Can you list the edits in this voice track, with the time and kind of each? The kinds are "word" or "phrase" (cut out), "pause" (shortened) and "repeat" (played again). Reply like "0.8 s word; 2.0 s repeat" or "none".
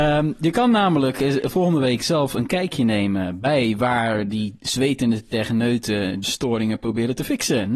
6.2 s word